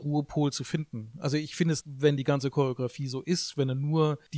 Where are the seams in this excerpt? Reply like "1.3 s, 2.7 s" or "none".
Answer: 1.8 s